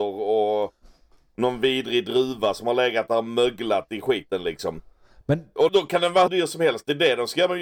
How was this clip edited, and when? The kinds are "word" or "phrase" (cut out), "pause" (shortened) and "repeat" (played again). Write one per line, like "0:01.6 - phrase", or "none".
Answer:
0:05.7 - word
0:06.3 - word